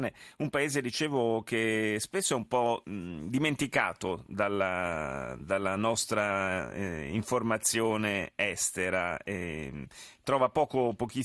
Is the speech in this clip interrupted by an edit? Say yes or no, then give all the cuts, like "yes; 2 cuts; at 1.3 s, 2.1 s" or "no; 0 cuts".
no; 0 cuts